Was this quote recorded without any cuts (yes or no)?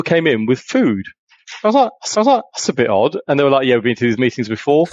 no